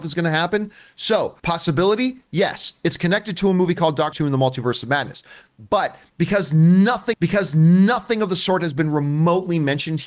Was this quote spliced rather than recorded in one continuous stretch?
yes; 3 cuts; at 1.4 s, 4.1 s, 7.1 s

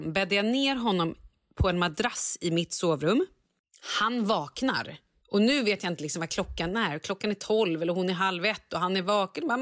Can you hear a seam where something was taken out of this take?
no; 0 cuts

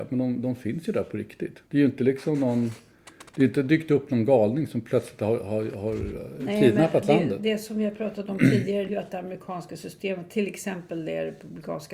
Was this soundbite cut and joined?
yes; 2 cuts; at 1.7 s, 8.9 s

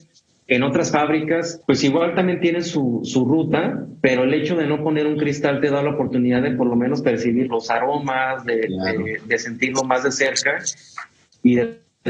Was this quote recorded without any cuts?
no; 2 cuts; at 1.6 s, 7.4 s

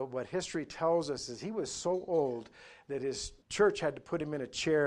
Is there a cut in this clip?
yes; 1 cut; at 3.4 s

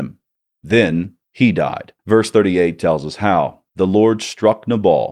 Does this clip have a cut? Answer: yes; 3 cuts; at 1.2 s, 2.0 s, 3.7 s

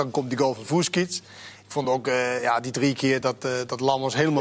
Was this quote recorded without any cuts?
yes; 0 cuts

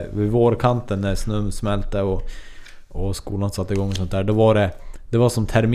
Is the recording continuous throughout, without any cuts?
yes; 0 cuts

